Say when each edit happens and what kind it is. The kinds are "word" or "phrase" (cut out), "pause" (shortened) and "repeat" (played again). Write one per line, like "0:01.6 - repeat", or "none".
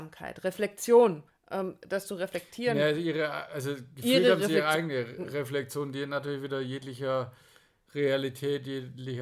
0:01.3 - pause